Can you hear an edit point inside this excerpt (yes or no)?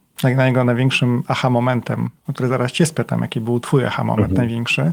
no